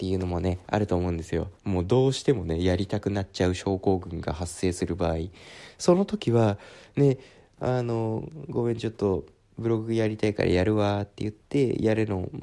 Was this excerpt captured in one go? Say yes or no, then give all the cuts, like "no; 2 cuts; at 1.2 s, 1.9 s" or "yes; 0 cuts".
no; 1 cut; at 1.6 s